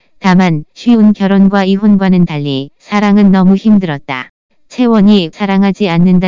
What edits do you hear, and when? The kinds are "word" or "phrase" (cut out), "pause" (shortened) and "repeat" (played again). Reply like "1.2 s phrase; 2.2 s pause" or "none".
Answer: 5.3 s word